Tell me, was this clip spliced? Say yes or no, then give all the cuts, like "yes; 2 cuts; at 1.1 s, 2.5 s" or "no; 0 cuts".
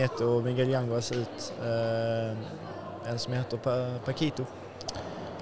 no; 0 cuts